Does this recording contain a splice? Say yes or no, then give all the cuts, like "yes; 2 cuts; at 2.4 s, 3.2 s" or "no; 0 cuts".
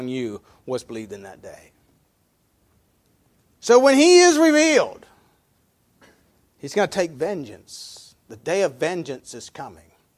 no; 0 cuts